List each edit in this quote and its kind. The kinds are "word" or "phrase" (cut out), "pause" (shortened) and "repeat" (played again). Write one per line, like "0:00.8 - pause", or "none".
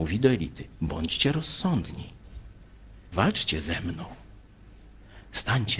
0:03.1 - word